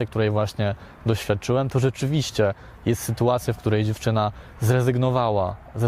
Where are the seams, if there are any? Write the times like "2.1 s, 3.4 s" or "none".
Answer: none